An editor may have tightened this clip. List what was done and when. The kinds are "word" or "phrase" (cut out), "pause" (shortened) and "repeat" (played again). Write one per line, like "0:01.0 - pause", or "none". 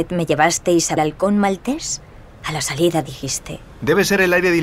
0:01.0 - phrase